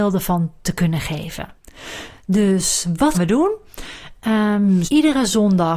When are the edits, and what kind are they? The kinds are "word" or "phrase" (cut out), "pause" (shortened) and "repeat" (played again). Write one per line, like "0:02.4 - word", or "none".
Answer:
0:03.1 - word
0:04.9 - word